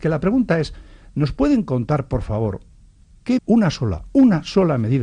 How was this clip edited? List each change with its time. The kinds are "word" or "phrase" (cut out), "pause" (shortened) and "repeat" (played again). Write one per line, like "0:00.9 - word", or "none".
0:03.4 - word